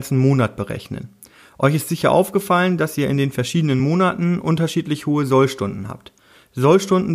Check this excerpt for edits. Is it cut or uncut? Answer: uncut